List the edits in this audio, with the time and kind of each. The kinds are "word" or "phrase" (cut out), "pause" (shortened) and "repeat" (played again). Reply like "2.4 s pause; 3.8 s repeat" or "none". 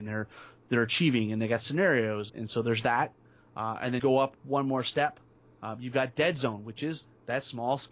2.3 s word; 4.0 s word